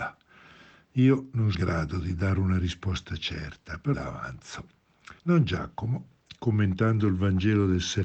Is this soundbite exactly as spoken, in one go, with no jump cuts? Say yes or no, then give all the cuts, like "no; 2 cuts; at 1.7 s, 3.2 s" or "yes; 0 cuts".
no; 3 cuts; at 1.5 s, 3.9 s, 5.2 s